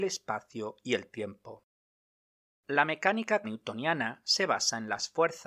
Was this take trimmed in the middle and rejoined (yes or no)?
yes